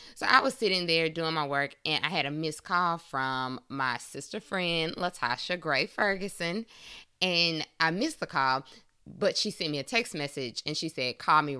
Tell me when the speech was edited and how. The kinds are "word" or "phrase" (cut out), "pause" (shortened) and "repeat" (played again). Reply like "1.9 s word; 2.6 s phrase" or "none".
none